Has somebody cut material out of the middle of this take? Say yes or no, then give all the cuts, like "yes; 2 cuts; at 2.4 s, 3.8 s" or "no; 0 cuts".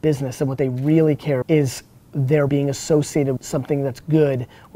yes; 3 cuts; at 1.4 s, 2.5 s, 3.4 s